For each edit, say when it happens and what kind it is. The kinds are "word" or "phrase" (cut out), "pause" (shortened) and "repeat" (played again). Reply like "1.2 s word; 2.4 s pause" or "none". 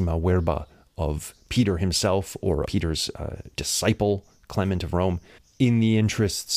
2.6 s word; 3.5 s word; 5.4 s pause